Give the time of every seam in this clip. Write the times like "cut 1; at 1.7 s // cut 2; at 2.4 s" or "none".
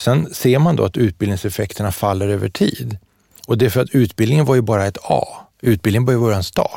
none